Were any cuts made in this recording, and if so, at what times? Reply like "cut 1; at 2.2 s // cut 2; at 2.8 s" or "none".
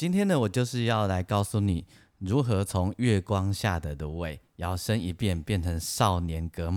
none